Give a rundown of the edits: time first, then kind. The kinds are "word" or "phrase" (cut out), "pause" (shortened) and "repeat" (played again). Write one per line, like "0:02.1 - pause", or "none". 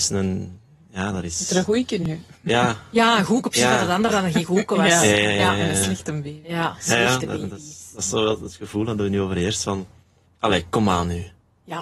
none